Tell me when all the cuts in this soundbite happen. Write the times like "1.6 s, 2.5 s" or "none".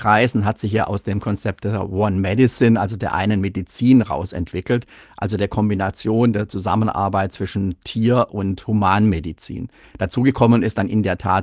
none

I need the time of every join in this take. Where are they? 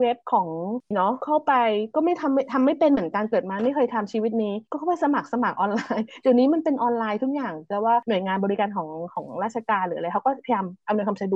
0.9 s

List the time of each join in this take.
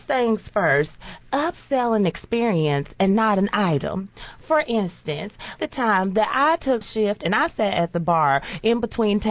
5.6 s, 6.8 s

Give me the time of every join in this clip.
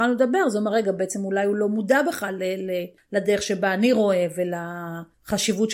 none

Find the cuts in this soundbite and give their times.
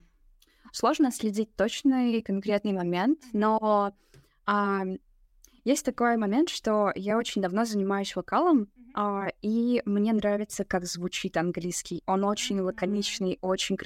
none

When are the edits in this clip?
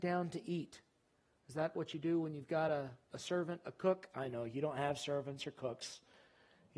none

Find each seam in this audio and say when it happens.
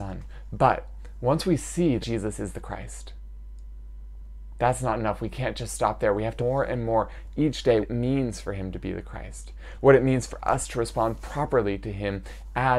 2.0 s, 6.4 s, 7.8 s

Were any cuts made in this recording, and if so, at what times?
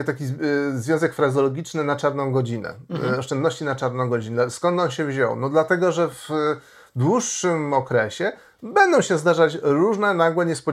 none

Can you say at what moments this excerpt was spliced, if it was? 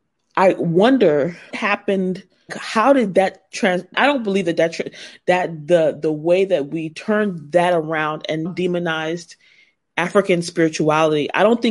1.5 s, 2.5 s, 3.9 s, 8.5 s

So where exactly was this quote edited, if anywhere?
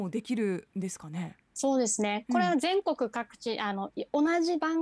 1.4 s

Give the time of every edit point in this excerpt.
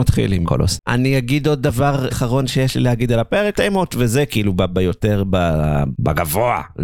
2.1 s, 3.5 s

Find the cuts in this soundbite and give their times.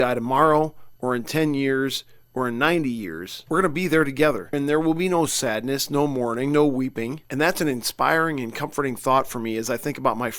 none

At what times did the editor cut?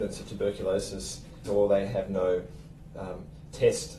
1.5 s

